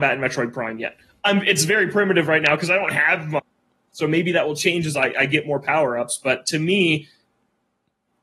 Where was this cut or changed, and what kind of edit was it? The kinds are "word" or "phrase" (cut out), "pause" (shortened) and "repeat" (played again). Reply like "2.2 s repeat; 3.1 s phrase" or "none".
none

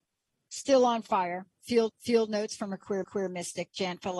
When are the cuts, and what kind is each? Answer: 1.9 s repeat; 3.0 s repeat

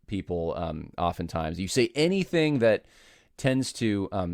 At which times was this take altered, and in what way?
none

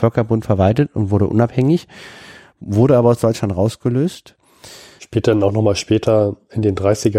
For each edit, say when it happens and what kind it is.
none

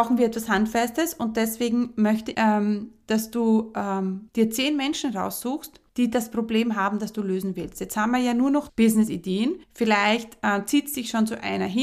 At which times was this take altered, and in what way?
2.3 s word; 4.3 s pause; 5.9 s pause; 8.7 s word; 9.6 s pause

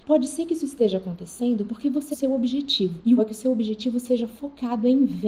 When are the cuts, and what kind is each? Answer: 2.1 s phrase; 3.2 s word

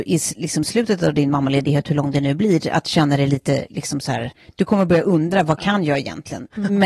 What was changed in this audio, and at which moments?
none

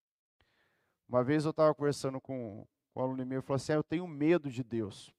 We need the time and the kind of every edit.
none

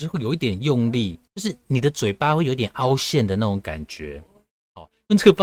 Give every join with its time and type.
1.3 s pause

